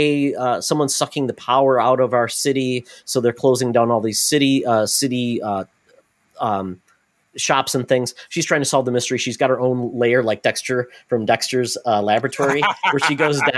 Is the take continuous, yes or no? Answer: yes